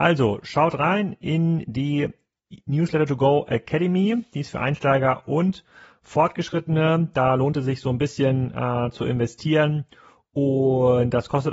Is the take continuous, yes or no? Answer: yes